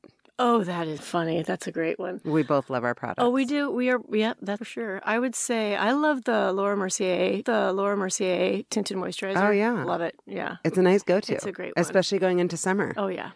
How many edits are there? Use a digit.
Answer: 3